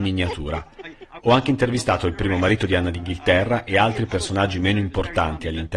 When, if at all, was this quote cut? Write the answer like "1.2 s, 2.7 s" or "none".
none